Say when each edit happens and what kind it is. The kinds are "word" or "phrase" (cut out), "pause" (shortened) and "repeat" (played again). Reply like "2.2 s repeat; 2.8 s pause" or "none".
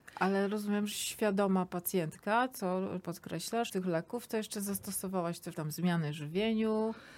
0.9 s word; 3.0 s word; 3.7 s word; 5.5 s word